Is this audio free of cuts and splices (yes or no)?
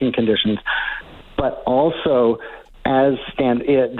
yes